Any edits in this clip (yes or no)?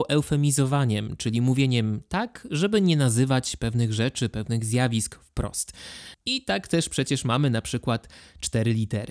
no